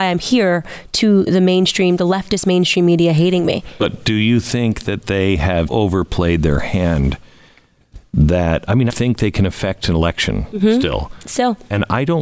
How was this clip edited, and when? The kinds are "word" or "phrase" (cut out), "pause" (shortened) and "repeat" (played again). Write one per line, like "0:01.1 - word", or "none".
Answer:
0:01.3 - word
0:05.7 - word
0:08.9 - phrase